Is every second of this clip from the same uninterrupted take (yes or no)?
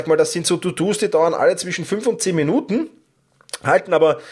yes